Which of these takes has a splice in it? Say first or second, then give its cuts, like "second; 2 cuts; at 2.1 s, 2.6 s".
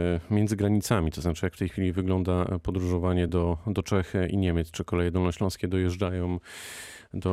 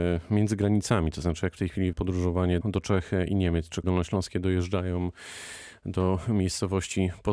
second; 3 cuts; at 1.9 s, 2.6 s, 3.8 s